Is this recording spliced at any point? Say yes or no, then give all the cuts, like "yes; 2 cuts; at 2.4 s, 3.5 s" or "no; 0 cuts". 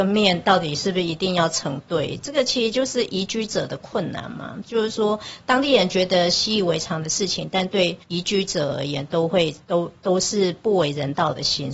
yes; 2 cuts; at 8.0 s, 9.6 s